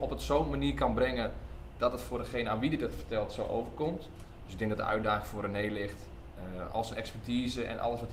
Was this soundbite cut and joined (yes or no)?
no